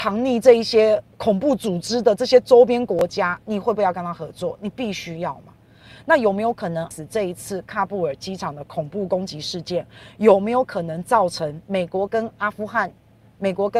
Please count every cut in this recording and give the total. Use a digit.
1